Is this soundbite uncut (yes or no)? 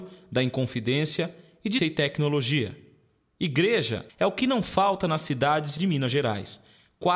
no